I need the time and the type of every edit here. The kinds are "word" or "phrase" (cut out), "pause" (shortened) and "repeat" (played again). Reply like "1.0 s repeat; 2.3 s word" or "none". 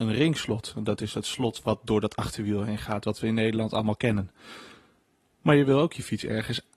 none